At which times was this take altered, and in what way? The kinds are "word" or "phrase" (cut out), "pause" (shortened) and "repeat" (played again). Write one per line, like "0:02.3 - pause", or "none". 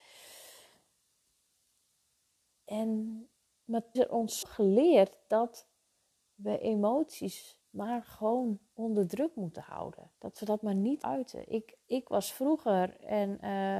0:04.0 - phrase
0:04.4 - word
0:07.6 - pause
0:10.1 - pause
0:11.0 - phrase
0:11.8 - pause